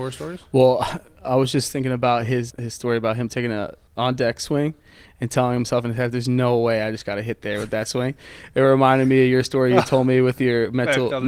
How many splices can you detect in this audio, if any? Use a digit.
2